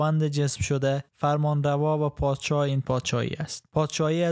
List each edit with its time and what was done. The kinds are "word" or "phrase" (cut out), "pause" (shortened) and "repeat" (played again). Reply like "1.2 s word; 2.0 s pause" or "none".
1.1 s pause